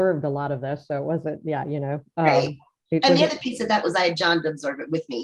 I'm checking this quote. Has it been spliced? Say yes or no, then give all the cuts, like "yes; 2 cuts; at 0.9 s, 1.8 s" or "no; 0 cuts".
no; 0 cuts